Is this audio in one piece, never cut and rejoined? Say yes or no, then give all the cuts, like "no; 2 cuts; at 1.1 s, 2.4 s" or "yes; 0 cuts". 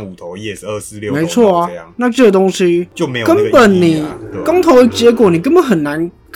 yes; 0 cuts